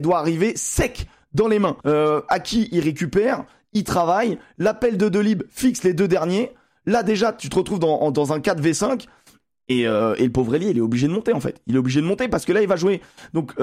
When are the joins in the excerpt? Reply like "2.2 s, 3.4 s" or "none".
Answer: 1.8 s